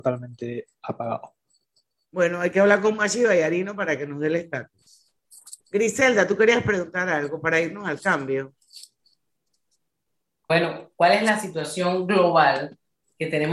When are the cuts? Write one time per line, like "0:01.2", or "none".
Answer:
0:05.6